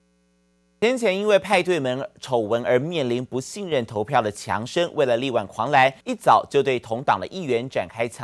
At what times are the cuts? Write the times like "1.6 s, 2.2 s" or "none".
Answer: 6.0 s

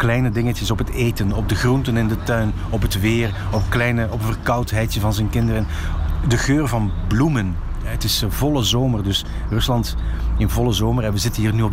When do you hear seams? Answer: none

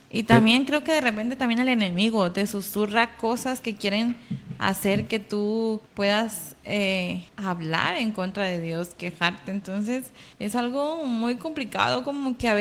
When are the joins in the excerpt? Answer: 5.9 s, 7.3 s, 10.3 s

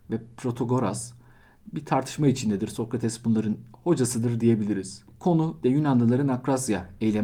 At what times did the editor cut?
5.6 s

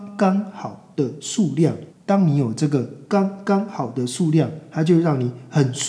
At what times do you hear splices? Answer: 1.9 s

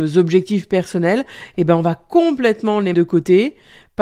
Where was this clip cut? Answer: 2.9 s

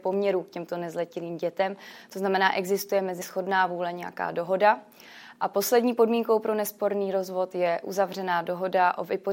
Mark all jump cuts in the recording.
3.2 s

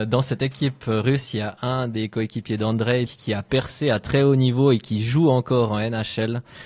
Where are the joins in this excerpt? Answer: 3.1 s

